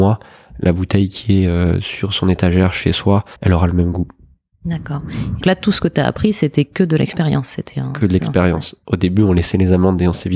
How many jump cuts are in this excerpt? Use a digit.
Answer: 2